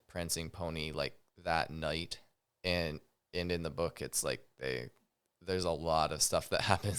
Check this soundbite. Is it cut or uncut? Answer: uncut